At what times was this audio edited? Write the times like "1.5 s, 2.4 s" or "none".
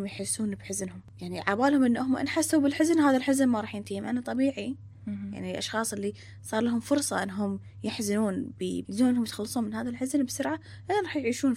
8.8 s

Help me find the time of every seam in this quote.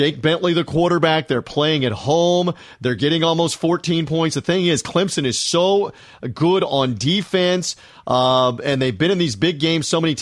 none

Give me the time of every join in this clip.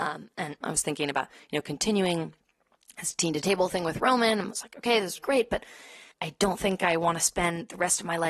5.2 s, 6.1 s

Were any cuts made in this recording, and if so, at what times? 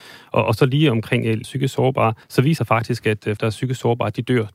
1.4 s, 2.2 s, 2.6 s, 3.4 s

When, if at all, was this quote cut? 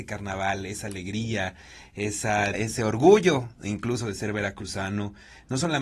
2.5 s

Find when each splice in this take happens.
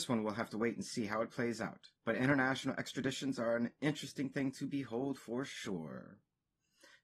2.0 s

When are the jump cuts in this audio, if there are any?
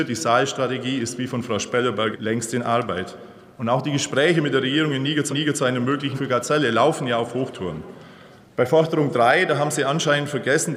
2.1 s, 5.3 s, 6.1 s, 8.4 s

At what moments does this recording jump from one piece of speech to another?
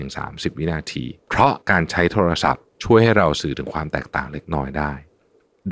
1.2 s, 1.6 s, 2.7 s

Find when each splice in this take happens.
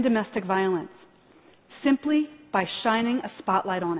none

